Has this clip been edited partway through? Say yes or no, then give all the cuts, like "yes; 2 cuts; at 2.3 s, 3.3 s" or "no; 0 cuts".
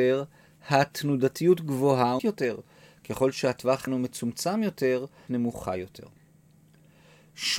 yes; 3 cuts; at 2.2 s, 3.9 s, 5.3 s